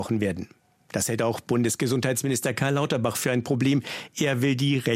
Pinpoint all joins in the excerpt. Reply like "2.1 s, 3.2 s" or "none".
none